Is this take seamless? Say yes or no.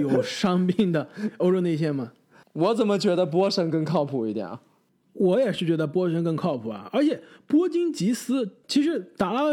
yes